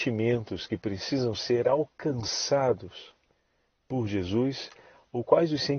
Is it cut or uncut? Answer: uncut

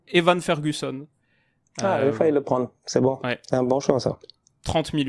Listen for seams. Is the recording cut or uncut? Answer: uncut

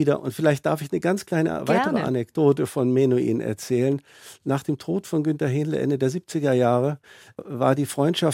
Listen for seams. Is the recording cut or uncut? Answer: uncut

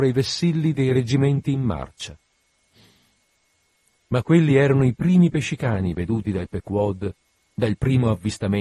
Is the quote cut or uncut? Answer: uncut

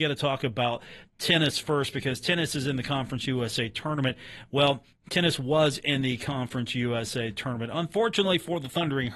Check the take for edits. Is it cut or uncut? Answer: uncut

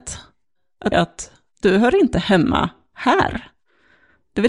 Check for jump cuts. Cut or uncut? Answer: cut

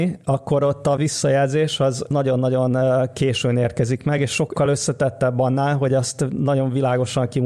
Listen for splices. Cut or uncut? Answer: uncut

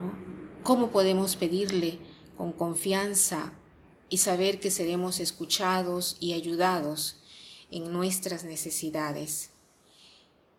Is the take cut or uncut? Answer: uncut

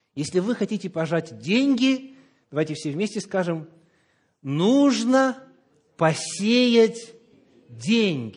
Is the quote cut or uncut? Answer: uncut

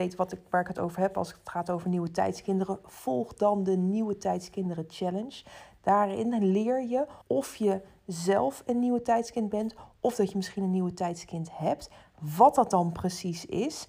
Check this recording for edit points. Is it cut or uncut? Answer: cut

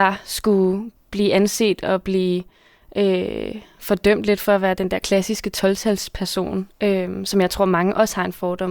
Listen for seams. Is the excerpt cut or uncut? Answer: uncut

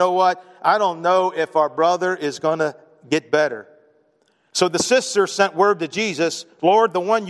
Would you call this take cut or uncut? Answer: uncut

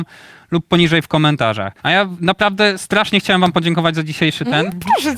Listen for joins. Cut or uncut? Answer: cut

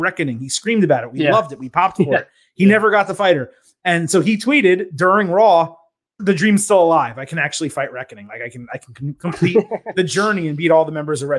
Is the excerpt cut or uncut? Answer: cut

